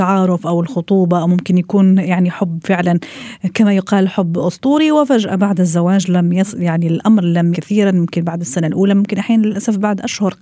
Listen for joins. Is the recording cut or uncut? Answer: cut